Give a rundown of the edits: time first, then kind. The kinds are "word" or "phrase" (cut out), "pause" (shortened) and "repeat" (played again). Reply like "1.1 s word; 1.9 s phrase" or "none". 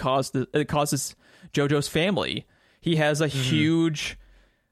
none